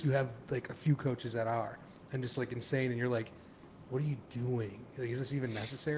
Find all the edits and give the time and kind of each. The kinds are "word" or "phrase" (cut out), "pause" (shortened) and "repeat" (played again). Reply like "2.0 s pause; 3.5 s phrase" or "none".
none